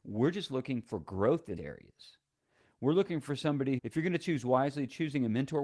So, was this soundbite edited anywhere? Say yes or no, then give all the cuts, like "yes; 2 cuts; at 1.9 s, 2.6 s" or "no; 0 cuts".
yes; 2 cuts; at 1.6 s, 3.8 s